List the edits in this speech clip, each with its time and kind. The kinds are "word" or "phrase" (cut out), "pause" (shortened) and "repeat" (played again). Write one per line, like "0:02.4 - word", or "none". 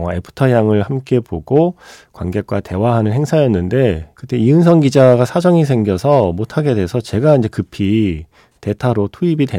none